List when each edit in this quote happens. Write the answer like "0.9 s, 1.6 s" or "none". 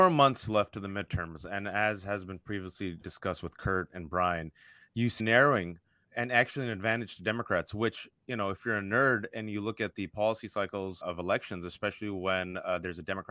3.0 s, 5.2 s, 6.1 s, 11.0 s